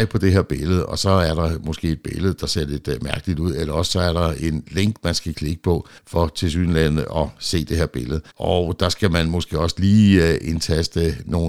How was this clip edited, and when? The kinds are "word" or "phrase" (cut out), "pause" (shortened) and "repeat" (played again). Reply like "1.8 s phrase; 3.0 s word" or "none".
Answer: 6.0 s pause; 8.3 s pause